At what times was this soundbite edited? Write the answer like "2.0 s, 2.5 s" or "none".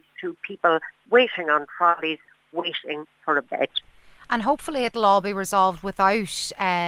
none